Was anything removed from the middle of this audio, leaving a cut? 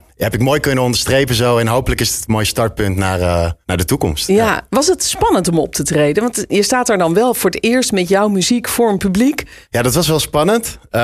yes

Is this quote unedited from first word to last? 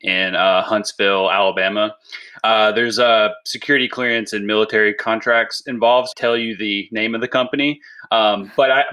no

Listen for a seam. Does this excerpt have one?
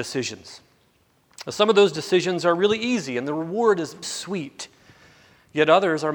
yes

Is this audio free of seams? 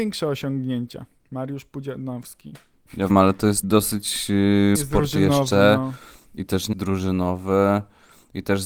no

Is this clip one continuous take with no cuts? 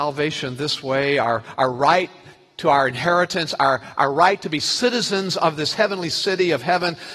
yes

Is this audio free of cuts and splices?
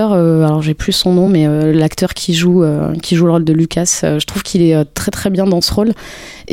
yes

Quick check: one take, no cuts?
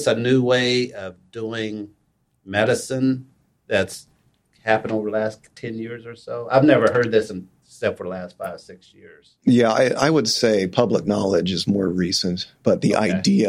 yes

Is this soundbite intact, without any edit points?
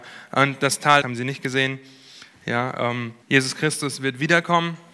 no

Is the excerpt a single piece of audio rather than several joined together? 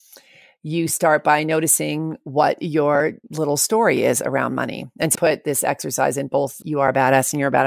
no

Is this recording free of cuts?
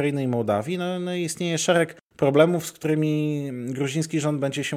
yes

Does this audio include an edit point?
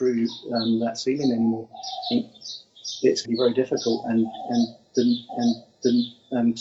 yes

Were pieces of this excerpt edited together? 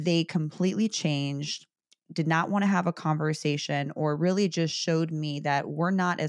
no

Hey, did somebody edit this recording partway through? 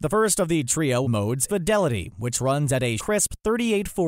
yes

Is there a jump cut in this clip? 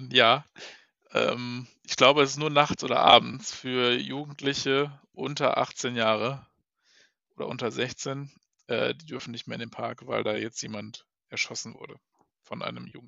no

